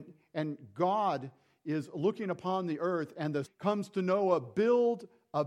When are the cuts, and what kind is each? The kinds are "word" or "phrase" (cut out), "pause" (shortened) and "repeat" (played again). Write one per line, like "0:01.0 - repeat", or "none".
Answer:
0:03.4 - word